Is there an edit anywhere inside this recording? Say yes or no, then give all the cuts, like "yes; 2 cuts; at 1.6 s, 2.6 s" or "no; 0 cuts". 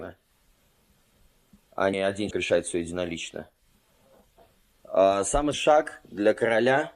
yes; 3 cuts; at 1.9 s, 2.3 s, 5.5 s